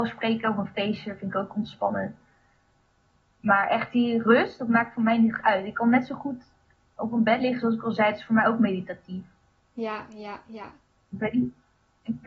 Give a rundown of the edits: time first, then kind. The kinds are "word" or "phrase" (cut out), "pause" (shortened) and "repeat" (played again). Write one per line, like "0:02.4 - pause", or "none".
none